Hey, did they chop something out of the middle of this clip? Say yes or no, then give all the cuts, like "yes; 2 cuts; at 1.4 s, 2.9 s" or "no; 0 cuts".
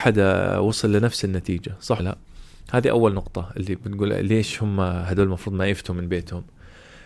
yes; 1 cut; at 2.0 s